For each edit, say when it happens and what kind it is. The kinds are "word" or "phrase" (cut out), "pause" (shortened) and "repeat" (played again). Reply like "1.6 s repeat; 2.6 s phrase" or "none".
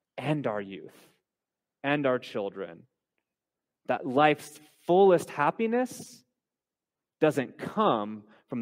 none